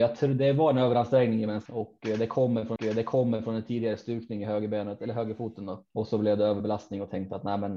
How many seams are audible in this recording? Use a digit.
3